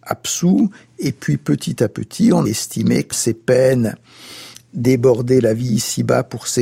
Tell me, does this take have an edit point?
yes; 2 cuts; at 2.4 s, 3.1 s

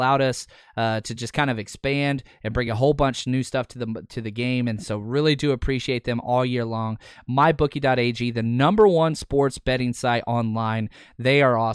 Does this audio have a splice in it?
no; 0 cuts

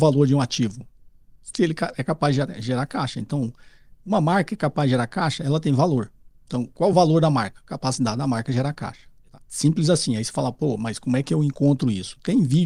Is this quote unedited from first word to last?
yes; 0 cuts

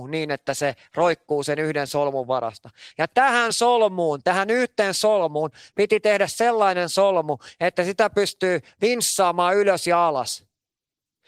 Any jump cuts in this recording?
no; 0 cuts

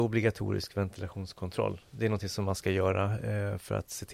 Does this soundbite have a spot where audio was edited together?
no; 0 cuts

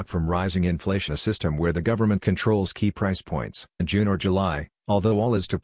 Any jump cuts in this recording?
yes; 2 cuts; at 1.1 s, 3.8 s

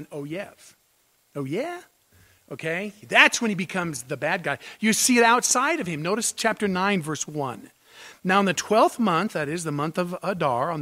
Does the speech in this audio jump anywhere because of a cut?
no; 0 cuts

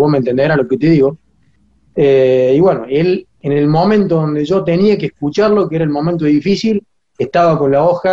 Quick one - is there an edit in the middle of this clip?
no; 0 cuts

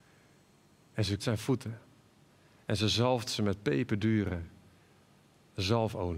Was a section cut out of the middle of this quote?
yes; 1 cut; at 1.2 s

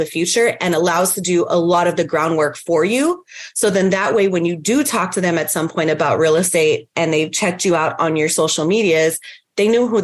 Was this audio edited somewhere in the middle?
no; 0 cuts

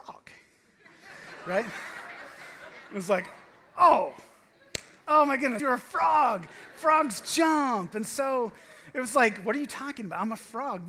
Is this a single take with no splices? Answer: no; 2 cuts; at 5.0 s, 5.6 s

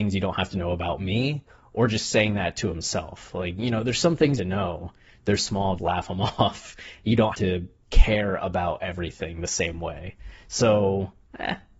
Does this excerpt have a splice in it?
yes; 4 cuts; at 4.4 s, 5.4 s, 5.8 s, 7.3 s

